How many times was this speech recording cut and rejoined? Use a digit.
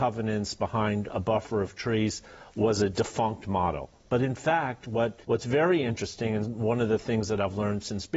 1